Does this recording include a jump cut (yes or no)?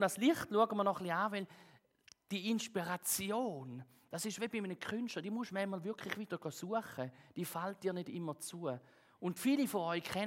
no